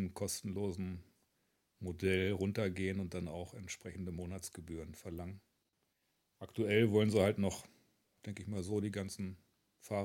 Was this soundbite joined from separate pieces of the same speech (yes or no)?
no